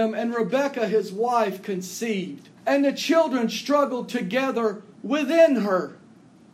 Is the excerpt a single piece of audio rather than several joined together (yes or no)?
no